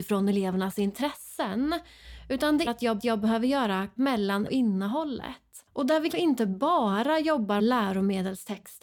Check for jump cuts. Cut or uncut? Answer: cut